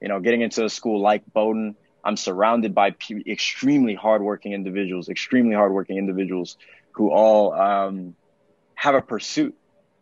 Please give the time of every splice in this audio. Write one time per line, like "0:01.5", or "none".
none